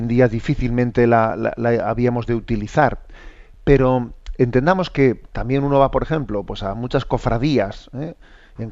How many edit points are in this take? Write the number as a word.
zero